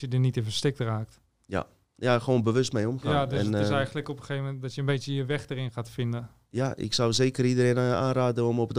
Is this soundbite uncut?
yes; 0 cuts

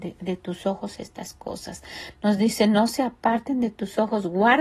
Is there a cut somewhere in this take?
no; 0 cuts

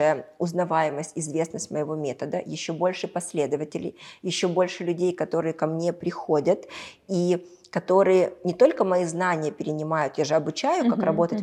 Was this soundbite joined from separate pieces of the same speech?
no; 0 cuts

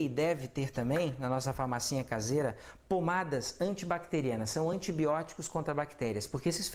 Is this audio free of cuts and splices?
yes; 0 cuts

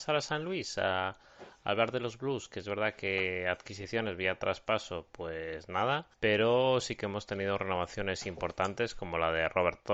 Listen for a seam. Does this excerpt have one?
yes; 1 cut; at 6.1 s

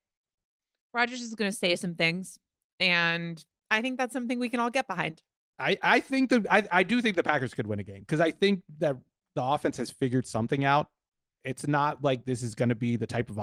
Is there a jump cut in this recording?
no; 0 cuts

